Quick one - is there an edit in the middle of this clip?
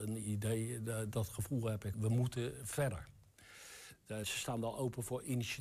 yes; 2 cuts; at 1.9 s, 4.2 s

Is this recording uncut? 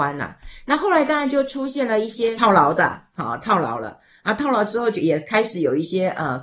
yes; 0 cuts

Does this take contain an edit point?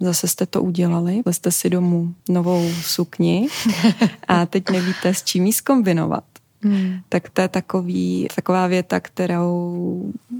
yes; 3 cuts; at 1.3 s, 2.2 s, 8.3 s

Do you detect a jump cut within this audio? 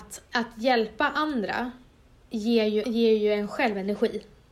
yes; 1 cut; at 2.8 s

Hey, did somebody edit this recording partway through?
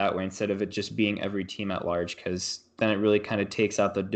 no; 0 cuts

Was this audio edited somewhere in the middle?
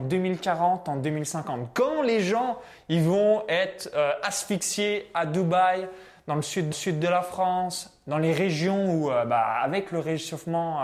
yes; 1 cut; at 6.7 s

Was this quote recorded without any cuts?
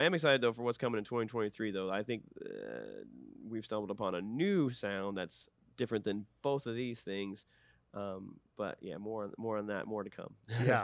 yes; 0 cuts

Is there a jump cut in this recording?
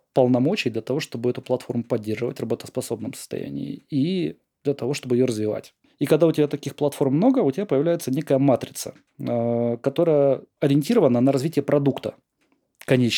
no; 0 cuts

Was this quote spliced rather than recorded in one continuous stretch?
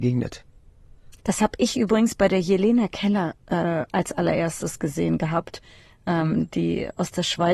yes; 1 cut; at 1.2 s

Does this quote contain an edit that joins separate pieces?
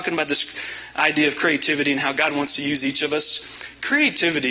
no; 0 cuts

